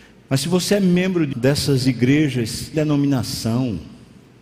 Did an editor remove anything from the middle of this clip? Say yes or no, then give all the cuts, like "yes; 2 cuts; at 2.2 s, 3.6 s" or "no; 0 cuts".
yes; 2 cuts; at 1.3 s, 2.7 s